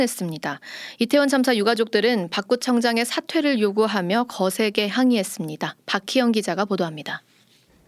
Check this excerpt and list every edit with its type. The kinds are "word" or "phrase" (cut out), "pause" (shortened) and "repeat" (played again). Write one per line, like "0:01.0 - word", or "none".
none

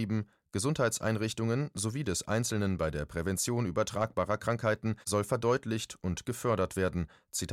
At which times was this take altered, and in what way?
0:05.0 - pause

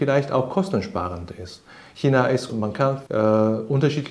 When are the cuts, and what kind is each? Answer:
0:02.5 - word
0:03.1 - word

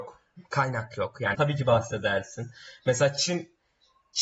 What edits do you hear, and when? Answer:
0:01.3 - word

